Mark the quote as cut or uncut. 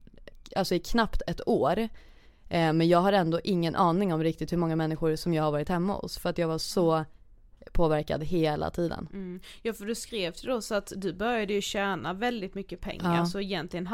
uncut